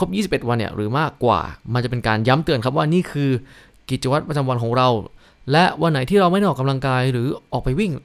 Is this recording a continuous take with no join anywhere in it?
yes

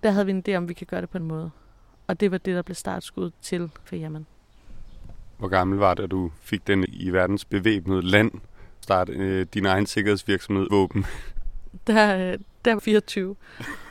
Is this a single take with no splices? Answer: no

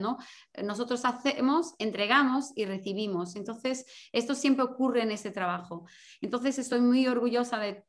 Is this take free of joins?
yes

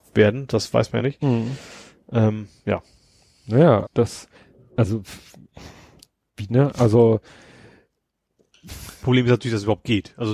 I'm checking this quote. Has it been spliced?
yes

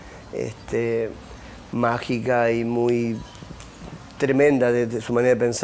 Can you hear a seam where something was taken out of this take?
no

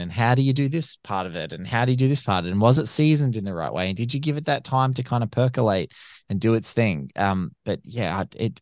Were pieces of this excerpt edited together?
no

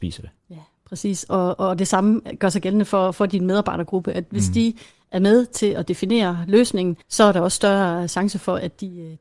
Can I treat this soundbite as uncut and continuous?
no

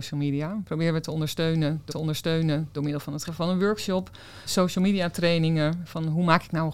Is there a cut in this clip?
yes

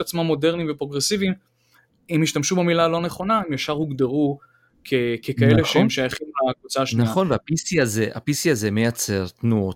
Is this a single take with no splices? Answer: yes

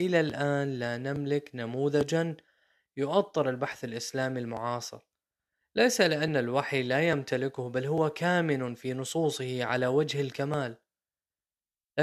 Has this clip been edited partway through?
no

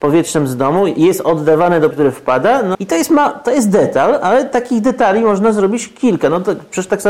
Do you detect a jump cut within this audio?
yes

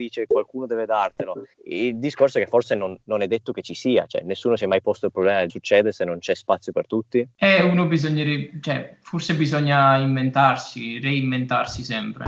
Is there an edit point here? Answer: yes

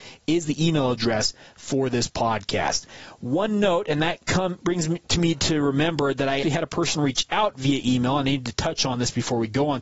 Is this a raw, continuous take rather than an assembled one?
no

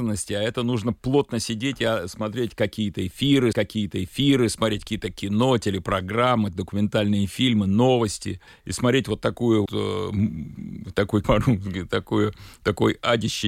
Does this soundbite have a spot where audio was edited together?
yes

